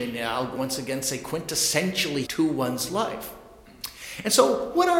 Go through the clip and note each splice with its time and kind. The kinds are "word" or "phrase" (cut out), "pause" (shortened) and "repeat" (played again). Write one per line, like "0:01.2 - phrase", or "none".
0:02.2 - phrase